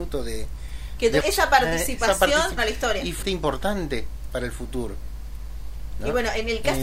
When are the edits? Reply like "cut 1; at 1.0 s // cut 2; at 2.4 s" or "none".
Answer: cut 1; at 1.2 s // cut 2; at 2.6 s // cut 3; at 3.2 s